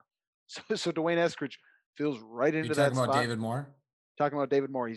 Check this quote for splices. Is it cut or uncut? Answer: uncut